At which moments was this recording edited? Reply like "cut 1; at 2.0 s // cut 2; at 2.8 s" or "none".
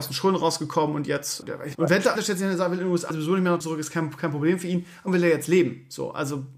cut 1; at 1.4 s // cut 2; at 1.7 s // cut 3; at 2.2 s // cut 4; at 3.1 s // cut 5; at 3.6 s // cut 6; at 5.1 s

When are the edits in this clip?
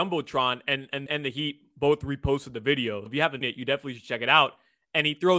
cut 1; at 1.1 s // cut 2; at 3.1 s // cut 3; at 3.4 s

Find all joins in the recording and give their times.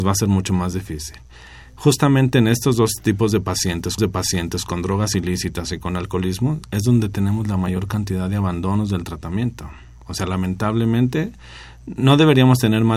cut 1; at 4.0 s

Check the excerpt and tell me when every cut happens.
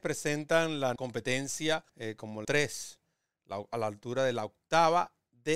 cut 1; at 1.0 s // cut 2; at 1.9 s // cut 3; at 2.4 s

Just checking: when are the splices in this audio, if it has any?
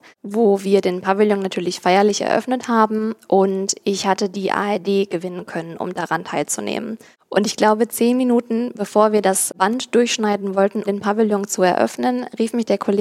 cut 1; at 10.9 s

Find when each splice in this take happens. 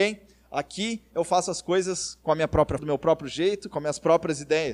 cut 1; at 2.8 s

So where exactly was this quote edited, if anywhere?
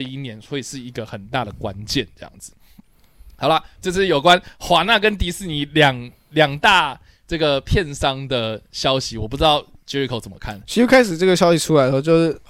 cut 1; at 3.8 s

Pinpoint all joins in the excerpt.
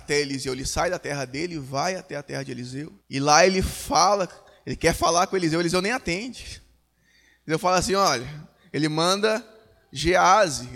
cut 1; at 3.0 s

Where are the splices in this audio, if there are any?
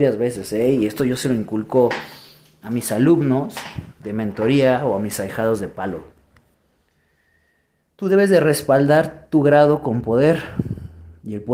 none

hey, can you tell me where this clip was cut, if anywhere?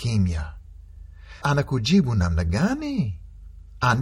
cut 1; at 1.4 s

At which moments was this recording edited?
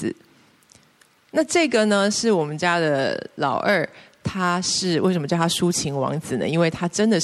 none

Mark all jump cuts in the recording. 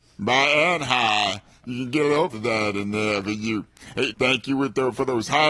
cut 1; at 2.3 s // cut 2; at 4.1 s

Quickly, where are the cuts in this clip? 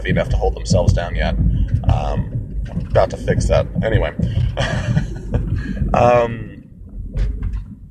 none

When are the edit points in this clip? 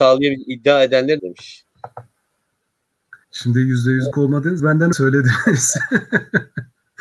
cut 1; at 1.2 s // cut 2; at 3.2 s // cut 3; at 4.1 s // cut 4; at 4.6 s // cut 5; at 4.9 s

